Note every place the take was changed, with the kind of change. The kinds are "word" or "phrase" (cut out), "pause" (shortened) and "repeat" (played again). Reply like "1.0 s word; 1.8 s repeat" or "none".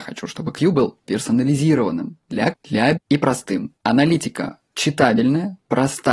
2.5 s word; 3.0 s word; 3.8 s pause